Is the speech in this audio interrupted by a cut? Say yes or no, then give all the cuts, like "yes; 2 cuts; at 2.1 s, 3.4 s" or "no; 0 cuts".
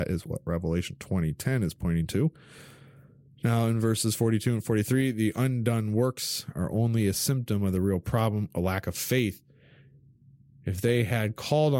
no; 0 cuts